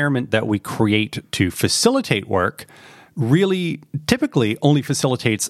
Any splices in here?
no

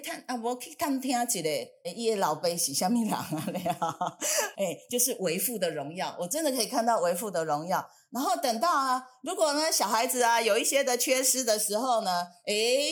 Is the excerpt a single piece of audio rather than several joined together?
no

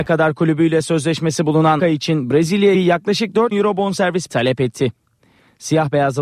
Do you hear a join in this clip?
yes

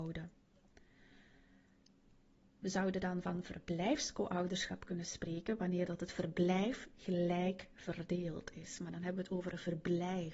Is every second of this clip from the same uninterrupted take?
yes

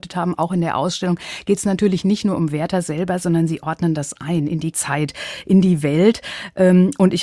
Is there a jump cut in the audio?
yes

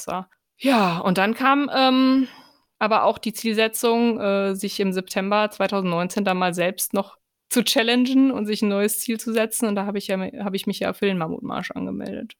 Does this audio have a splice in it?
no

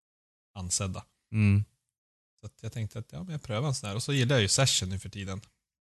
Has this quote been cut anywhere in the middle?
no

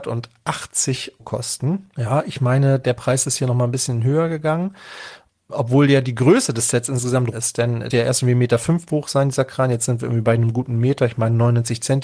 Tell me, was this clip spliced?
yes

